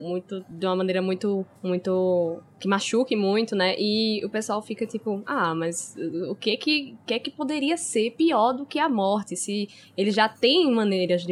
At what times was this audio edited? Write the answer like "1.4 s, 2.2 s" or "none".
none